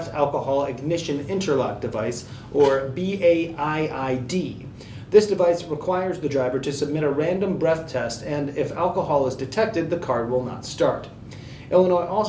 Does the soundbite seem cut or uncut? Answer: uncut